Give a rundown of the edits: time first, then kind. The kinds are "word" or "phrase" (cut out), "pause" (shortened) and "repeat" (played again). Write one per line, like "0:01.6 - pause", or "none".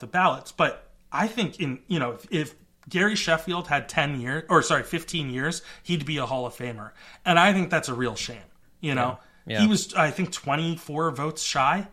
0:02.3 - word